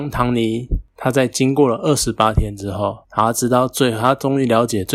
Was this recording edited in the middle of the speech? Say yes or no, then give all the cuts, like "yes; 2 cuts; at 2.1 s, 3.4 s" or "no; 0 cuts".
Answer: yes; 1 cut; at 3.0 s